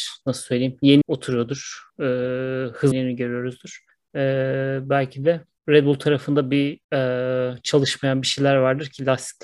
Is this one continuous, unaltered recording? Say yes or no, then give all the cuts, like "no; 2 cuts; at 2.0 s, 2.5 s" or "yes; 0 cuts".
no; 6 cuts; at 1.0 s, 1.9 s, 2.9 s, 3.9 s, 5.6 s, 6.8 s